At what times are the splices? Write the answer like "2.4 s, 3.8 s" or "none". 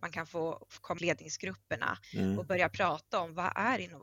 1.0 s, 2.0 s